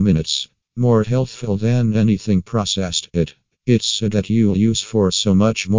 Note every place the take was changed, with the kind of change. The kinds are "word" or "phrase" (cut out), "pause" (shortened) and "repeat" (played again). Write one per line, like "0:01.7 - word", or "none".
0:04.1 - word